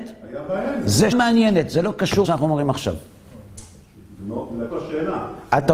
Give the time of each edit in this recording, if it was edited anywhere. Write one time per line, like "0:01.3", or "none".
0:01.1
0:02.2
0:04.7